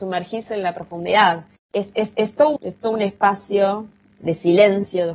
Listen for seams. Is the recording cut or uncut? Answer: cut